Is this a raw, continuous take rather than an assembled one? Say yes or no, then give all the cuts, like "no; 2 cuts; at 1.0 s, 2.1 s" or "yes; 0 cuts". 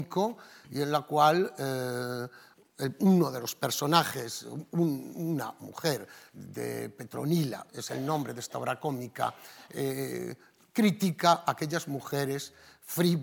yes; 0 cuts